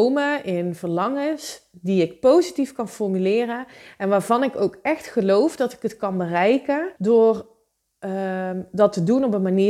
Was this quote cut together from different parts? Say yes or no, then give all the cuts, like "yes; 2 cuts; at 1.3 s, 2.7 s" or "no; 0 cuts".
yes; 1 cut; at 7.0 s